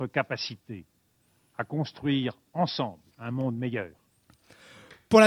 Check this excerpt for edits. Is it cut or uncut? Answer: cut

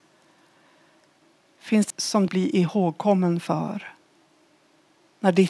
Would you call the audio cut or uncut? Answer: cut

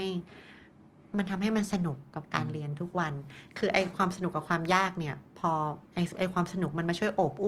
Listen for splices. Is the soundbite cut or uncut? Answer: cut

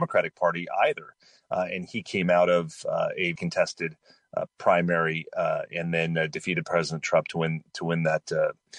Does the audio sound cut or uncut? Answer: cut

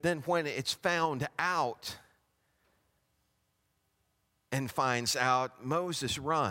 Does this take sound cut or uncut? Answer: cut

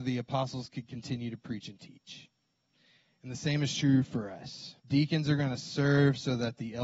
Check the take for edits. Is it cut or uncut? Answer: cut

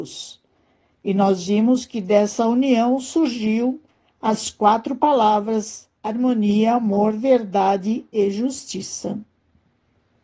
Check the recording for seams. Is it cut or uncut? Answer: uncut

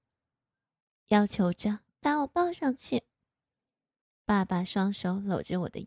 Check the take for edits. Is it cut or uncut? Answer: cut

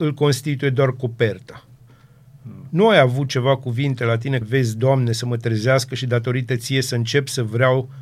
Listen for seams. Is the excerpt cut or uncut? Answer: cut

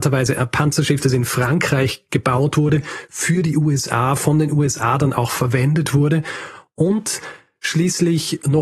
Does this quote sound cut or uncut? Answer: uncut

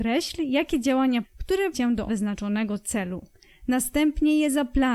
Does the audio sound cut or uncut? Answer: cut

